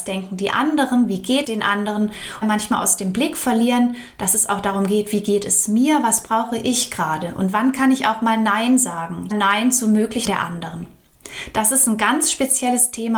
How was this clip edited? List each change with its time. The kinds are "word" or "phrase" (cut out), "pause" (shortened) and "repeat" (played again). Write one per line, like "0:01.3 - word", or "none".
0:01.4 - word
0:02.4 - phrase
0:09.3 - phrase
0:10.3 - word

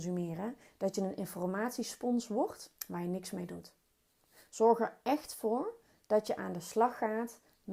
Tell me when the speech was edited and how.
0:02.8 - pause

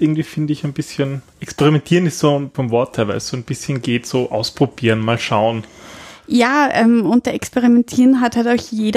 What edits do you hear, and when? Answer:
0:02.5 - phrase

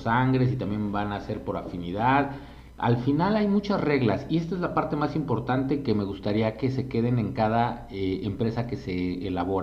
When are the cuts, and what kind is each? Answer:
none

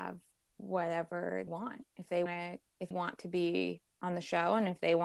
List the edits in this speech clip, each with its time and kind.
0:01.5 - word
0:01.9 - pause
0:02.3 - word
0:02.9 - word

